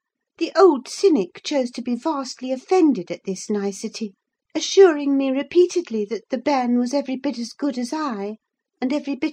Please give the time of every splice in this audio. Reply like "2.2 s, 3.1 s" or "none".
none